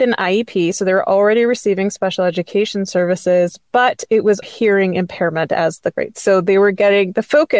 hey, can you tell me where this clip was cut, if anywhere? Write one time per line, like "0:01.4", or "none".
0:04.4
0:05.9